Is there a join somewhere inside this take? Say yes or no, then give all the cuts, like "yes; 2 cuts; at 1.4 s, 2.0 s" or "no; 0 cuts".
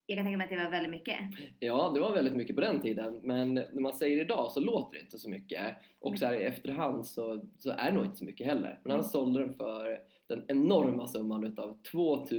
no; 0 cuts